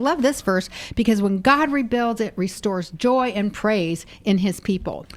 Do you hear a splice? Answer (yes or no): no